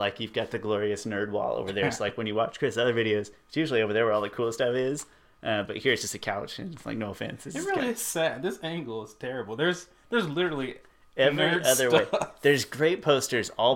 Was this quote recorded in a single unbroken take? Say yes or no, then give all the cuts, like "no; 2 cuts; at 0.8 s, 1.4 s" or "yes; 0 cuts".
yes; 0 cuts